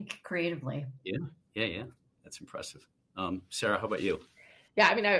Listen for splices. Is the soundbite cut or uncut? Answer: uncut